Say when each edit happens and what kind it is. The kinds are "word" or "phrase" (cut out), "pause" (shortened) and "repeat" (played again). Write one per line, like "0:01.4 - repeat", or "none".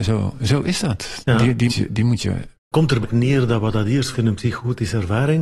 0:01.7 - word
0:02.7 - word
0:03.0 - word
0:04.1 - word